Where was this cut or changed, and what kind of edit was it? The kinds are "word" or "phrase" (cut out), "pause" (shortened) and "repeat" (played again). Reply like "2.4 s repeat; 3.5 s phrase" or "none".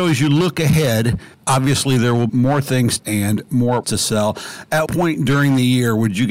1.3 s pause; 2.3 s word; 3.0 s phrase; 3.8 s word; 4.9 s word